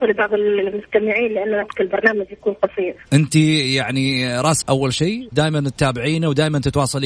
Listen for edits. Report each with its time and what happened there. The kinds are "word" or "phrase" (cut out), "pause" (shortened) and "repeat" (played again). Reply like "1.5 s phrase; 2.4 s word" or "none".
1.6 s word; 3.0 s pause; 4.6 s word; 5.3 s phrase